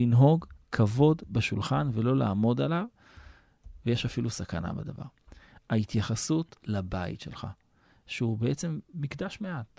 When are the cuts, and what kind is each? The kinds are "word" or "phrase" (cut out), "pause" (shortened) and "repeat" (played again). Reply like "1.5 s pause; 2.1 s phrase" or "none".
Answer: none